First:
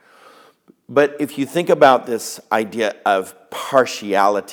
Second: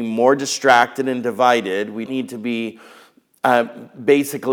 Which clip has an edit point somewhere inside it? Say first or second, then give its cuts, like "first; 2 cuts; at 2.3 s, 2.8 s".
second; 1 cut; at 2.1 s